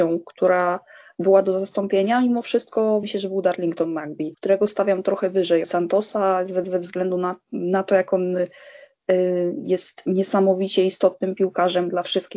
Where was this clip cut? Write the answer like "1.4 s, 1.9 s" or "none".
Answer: 3.0 s, 5.6 s, 6.6 s

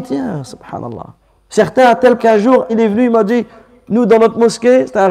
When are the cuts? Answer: 1.2 s, 2.2 s, 2.7 s

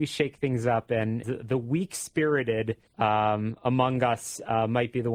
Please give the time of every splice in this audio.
1.2 s, 2.9 s

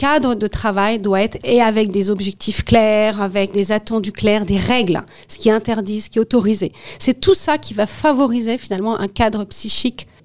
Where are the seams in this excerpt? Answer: 1.4 s, 3.5 s

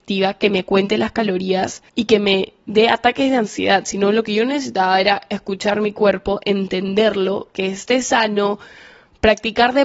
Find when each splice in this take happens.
1.9 s

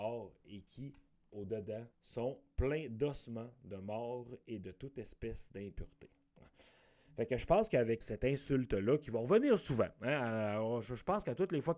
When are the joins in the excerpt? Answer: 1.1 s, 1.9 s, 8.0 s

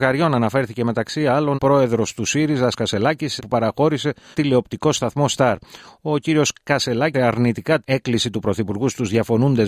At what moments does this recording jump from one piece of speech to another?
1.5 s, 2.7 s, 3.4 s, 4.3 s, 7.1 s, 7.8 s

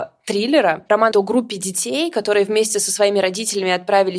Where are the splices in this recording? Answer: 1.1 s

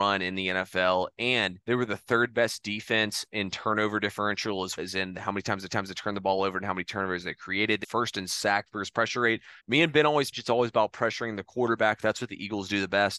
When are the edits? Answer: 1.6 s, 4.8 s, 5.7 s, 7.8 s, 9.6 s, 10.3 s

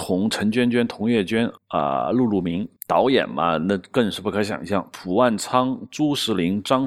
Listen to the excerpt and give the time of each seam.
1.6 s, 2.8 s

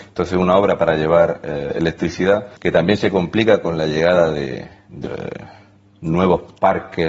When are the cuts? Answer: 2.6 s, 5.0 s

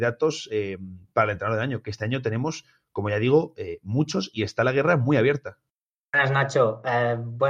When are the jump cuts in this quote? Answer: none

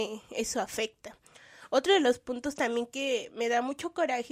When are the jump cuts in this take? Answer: none

